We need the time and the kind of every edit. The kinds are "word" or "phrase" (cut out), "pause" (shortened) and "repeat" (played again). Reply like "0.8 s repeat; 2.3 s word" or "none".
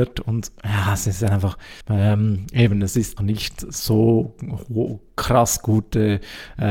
1.8 s pause; 3.2 s word